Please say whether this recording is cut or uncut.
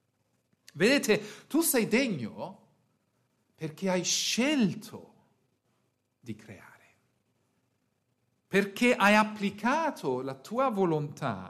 uncut